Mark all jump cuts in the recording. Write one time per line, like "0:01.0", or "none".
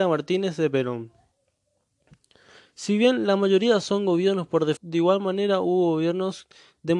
0:04.8

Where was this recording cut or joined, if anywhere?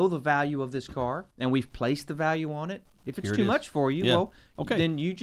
0:01.3

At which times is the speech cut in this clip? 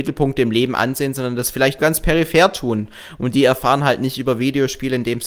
0:01.8

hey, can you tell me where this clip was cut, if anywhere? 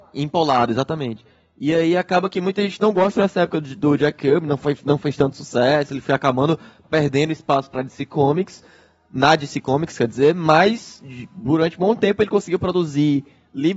none

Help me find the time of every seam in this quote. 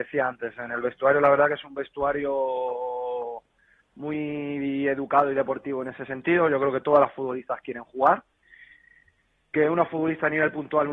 none

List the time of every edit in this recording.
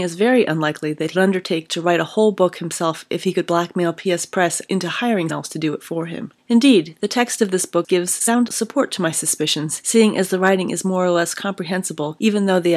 0:01.1
0:05.3

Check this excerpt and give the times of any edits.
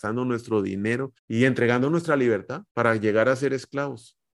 0:01.2
0:02.7

